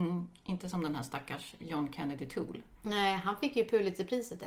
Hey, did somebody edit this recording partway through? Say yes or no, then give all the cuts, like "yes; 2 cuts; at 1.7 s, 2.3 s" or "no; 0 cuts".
no; 0 cuts